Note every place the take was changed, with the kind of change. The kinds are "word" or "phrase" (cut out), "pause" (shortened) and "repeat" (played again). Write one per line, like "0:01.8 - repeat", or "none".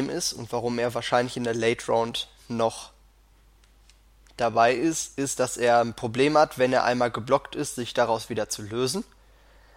none